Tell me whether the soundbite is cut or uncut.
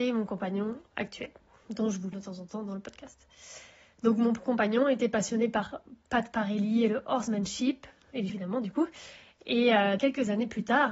cut